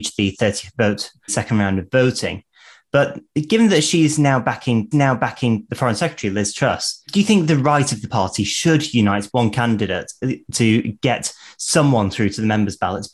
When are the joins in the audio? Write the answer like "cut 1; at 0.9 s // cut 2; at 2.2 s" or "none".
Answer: cut 1; at 1.3 s // cut 2; at 4.9 s // cut 3; at 9.3 s

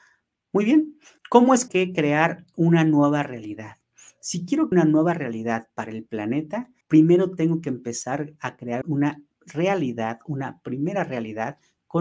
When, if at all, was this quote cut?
cut 1; at 1.2 s // cut 2; at 1.7 s // cut 3; at 4.7 s // cut 4; at 6.8 s // cut 5; at 8.8 s // cut 6; at 9.3 s

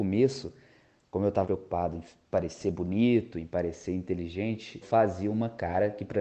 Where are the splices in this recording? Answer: cut 1; at 1.4 s // cut 2; at 4.8 s

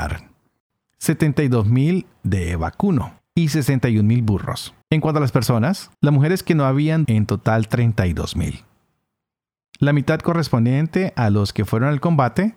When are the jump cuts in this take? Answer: cut 1; at 3.2 s // cut 2; at 4.8 s // cut 3; at 5.9 s // cut 4; at 7.0 s

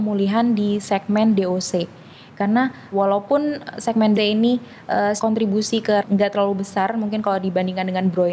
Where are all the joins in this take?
cut 1; at 2.9 s // cut 2; at 4.1 s // cut 3; at 5.2 s // cut 4; at 6.0 s

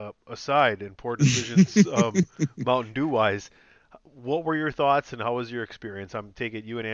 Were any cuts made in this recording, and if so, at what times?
none

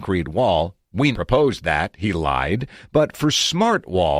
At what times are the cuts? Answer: cut 1; at 1.1 s

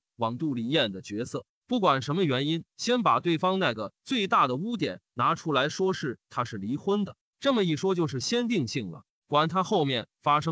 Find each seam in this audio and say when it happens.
cut 1; at 2.7 s

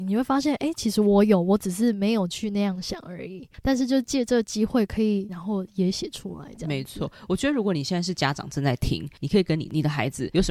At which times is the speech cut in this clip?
cut 1; at 5.3 s

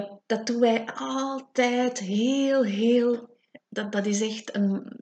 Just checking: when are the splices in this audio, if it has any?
cut 1; at 3.6 s

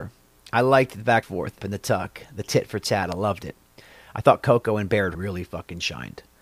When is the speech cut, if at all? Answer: cut 1; at 1.2 s // cut 2; at 1.6 s // cut 3; at 5.1 s

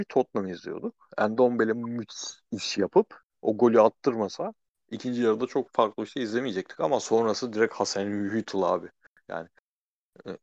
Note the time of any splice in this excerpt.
cut 1; at 2.4 s // cut 2; at 3.3 s

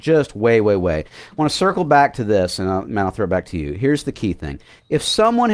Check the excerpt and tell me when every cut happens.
none

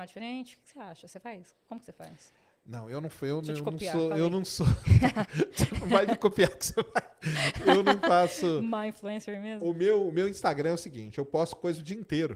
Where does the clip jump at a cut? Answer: none

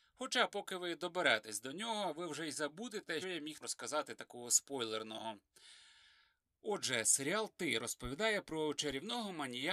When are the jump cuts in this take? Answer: cut 1; at 3.2 s // cut 2; at 3.6 s

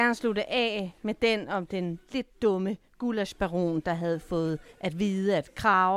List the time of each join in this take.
none

